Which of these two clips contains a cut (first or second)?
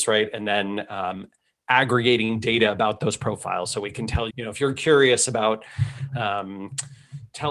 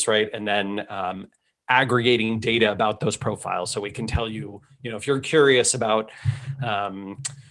first